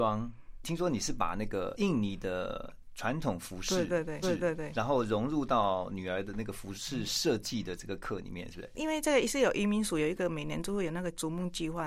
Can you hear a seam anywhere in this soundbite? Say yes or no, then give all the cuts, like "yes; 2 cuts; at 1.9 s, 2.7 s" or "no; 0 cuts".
yes; 1 cut; at 4.2 s